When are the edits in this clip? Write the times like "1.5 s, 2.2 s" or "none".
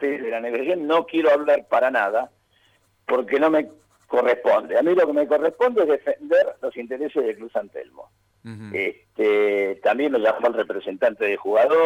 none